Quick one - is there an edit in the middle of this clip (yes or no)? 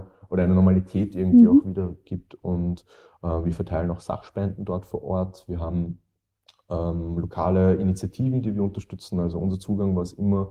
no